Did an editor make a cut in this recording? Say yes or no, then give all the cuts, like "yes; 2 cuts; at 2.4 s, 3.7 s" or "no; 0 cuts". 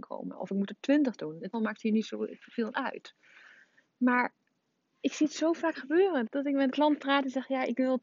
yes; 3 cuts; at 1.5 s, 6.3 s, 6.7 s